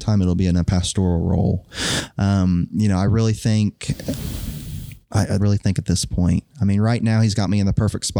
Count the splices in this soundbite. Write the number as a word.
one